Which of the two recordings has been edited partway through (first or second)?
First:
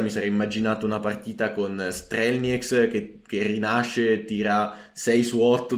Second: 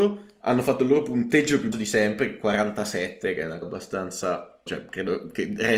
second